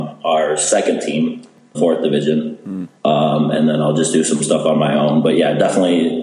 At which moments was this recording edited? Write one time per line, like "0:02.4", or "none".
0:01.7
0:03.0